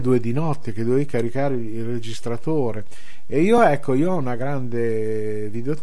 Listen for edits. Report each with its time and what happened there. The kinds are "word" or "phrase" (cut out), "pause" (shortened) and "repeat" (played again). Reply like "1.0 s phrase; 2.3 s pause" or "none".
none

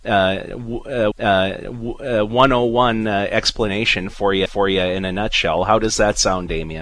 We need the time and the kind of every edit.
1.1 s repeat; 4.5 s repeat

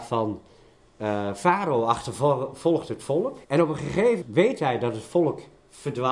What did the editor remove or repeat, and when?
3.4 s pause; 4.2 s word

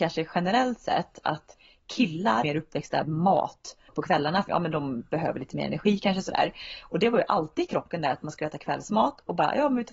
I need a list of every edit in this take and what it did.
2.4 s word; 3.0 s word; 3.9 s word; 4.5 s word

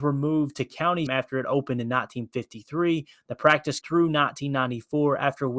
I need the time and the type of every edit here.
1.1 s word; 3.8 s word

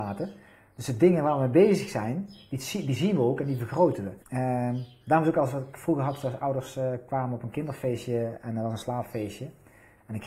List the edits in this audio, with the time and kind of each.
4.2 s pause

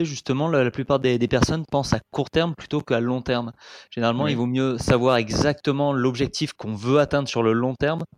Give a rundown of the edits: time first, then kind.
none

